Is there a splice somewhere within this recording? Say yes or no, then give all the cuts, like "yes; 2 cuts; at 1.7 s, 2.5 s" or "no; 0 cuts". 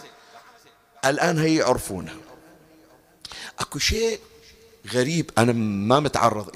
no; 0 cuts